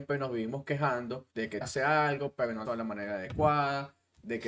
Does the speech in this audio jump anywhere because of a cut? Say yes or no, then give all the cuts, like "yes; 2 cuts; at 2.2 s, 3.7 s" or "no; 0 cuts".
yes; 3 cuts; at 1.3 s, 1.6 s, 2.6 s